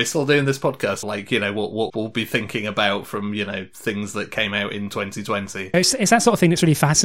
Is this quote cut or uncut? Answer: cut